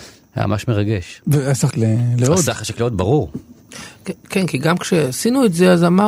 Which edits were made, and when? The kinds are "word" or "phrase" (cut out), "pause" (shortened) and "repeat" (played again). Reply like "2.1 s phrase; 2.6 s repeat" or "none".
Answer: 1.7 s word